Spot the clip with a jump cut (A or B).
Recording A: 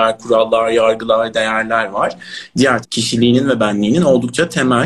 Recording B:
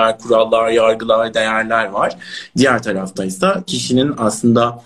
A